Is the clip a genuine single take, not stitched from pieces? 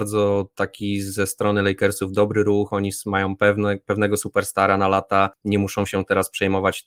yes; 0 cuts

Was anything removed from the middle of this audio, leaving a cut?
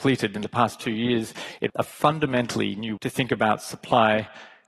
yes; 2 cuts; at 1.7 s, 3.0 s

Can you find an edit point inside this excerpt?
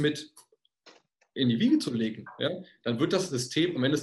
no; 0 cuts

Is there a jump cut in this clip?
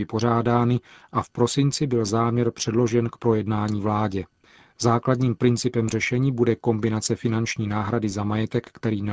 no; 0 cuts

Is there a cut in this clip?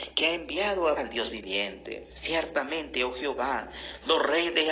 yes; 2 cuts; at 1.0 s, 2.1 s

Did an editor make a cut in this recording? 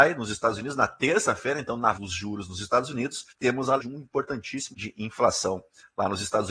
yes; 4 cuts; at 1.9 s, 3.3 s, 3.8 s, 4.7 s

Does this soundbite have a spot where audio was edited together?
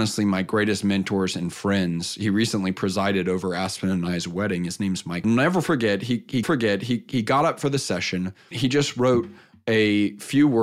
yes; 3 cuts; at 5.2 s, 6.4 s, 8.5 s

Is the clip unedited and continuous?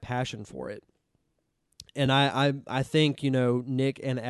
yes; 0 cuts

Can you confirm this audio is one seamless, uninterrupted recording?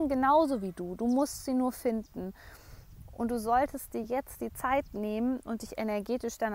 yes; 0 cuts

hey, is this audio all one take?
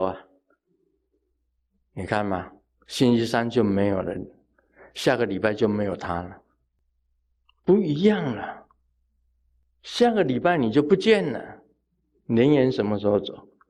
yes; 0 cuts

